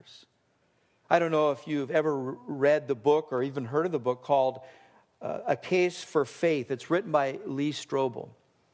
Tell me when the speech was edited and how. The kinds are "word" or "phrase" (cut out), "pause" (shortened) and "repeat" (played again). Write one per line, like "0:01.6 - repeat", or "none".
none